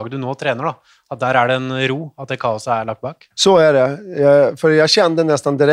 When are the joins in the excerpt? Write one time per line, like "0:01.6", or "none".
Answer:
0:03.3